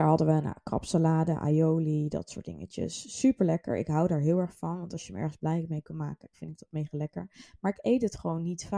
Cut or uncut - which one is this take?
cut